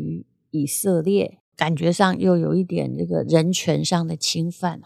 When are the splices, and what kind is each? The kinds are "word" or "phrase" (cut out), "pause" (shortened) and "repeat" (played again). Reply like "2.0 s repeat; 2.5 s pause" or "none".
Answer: 1.5 s pause